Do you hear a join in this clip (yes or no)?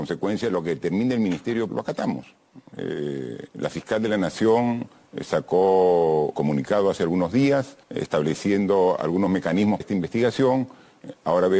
yes